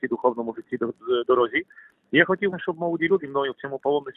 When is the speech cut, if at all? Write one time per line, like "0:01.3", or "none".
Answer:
0:01.2
0:02.5
0:03.2